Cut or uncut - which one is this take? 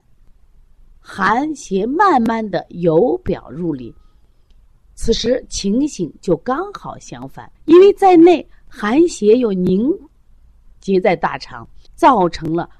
cut